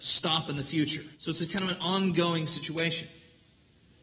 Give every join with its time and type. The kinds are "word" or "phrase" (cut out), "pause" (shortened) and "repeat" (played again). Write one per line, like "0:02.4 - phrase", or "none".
0:01.1 - pause